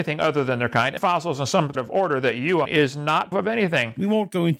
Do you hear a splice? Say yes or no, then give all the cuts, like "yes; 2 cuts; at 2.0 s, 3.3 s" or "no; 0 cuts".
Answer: yes; 4 cuts; at 1.0 s, 1.7 s, 2.6 s, 3.3 s